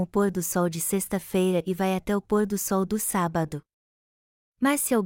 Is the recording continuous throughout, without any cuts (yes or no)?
yes